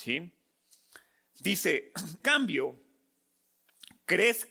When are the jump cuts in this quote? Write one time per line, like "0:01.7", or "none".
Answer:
0:02.2